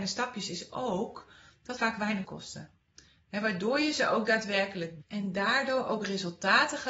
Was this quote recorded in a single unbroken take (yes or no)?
no